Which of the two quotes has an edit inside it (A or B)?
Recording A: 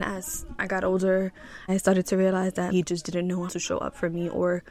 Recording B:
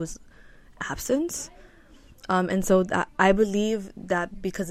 A